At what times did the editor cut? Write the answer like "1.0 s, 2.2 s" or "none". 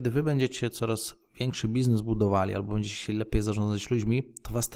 none